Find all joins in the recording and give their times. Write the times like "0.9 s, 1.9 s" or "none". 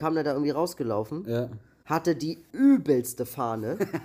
none